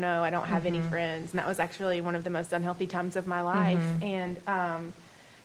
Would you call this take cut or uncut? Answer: uncut